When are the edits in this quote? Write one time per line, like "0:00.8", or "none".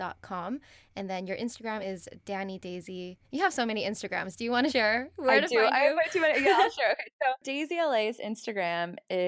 0:03.2
0:04.7